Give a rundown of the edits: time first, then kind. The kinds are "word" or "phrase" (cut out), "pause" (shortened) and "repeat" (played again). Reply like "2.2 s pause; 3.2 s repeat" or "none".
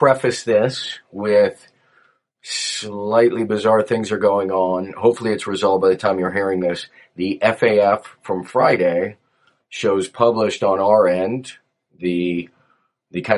none